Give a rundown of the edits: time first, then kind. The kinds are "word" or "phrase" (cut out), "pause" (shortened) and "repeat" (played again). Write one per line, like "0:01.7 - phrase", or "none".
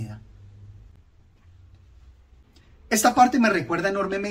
none

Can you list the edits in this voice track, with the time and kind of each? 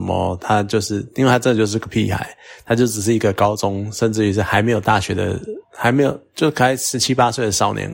0:05.6 - pause

